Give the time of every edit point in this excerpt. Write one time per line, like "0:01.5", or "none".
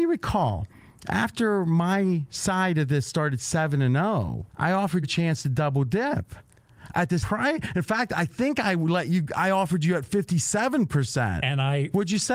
0:04.5
0:05.0
0:07.2